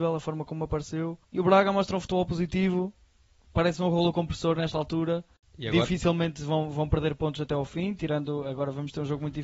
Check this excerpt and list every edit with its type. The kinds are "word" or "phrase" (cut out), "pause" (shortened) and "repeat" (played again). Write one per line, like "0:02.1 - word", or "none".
0:01.2 - pause